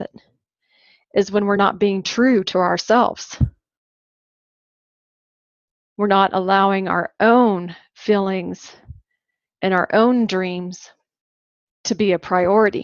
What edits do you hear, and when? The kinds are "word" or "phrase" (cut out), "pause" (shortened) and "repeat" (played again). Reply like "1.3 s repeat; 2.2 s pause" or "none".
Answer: none

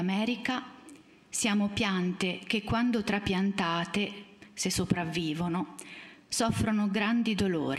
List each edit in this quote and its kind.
none

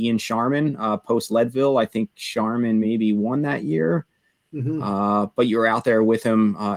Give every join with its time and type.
none

